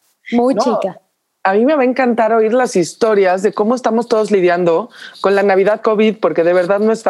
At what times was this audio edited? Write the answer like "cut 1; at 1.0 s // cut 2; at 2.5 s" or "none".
none